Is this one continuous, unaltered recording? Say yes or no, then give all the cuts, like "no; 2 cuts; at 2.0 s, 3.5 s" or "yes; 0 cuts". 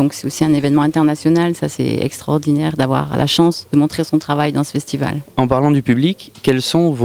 yes; 0 cuts